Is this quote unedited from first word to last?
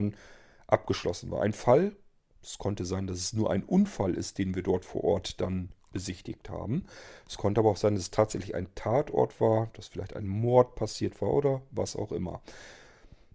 yes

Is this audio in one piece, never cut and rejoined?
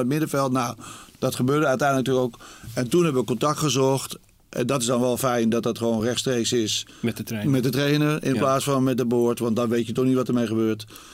yes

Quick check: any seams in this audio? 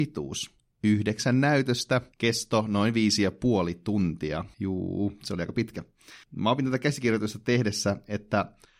yes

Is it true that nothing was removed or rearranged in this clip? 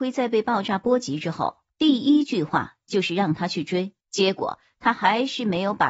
no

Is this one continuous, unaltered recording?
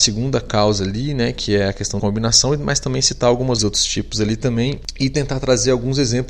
no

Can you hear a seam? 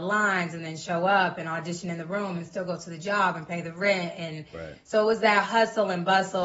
no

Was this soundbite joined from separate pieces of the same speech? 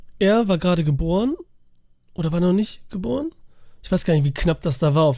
no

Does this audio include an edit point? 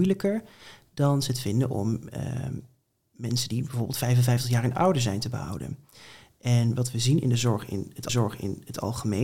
yes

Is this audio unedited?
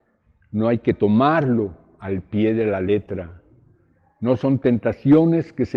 yes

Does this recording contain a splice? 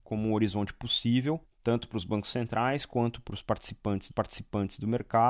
yes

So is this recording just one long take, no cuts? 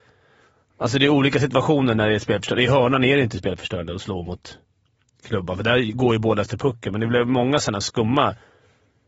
yes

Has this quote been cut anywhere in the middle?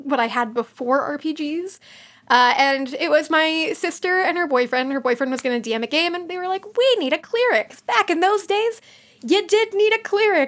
no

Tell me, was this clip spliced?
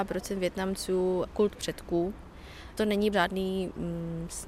yes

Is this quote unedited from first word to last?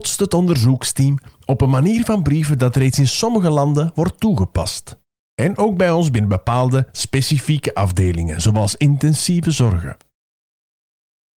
yes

